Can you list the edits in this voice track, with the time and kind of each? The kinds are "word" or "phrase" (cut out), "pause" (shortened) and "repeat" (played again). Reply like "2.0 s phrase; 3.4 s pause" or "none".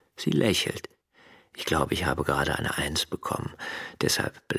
none